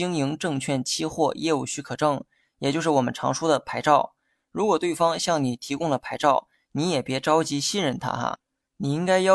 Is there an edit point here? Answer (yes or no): no